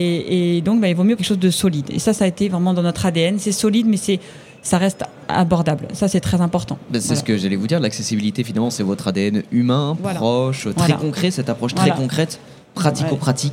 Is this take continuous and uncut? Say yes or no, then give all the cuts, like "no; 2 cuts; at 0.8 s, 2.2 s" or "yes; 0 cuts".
no; 2 cuts; at 1.2 s, 12.6 s